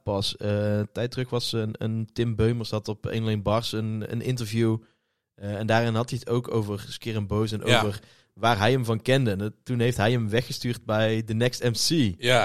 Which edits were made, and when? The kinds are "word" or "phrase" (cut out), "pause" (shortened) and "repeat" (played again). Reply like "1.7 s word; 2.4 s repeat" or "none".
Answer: none